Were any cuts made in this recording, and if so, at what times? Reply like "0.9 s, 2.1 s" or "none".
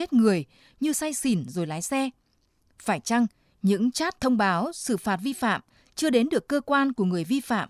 none